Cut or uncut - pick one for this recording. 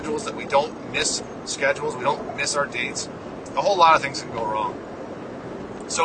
uncut